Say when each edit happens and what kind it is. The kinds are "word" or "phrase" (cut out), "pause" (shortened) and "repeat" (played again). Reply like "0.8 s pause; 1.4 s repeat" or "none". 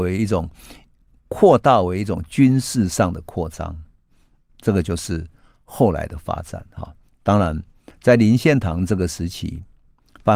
none